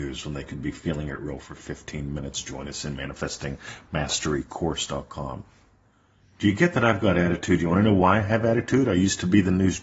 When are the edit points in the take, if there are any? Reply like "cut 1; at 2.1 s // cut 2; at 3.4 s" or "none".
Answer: none